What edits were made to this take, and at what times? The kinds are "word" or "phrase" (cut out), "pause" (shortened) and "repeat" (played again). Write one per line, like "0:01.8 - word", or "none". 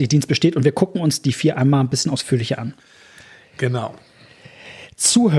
none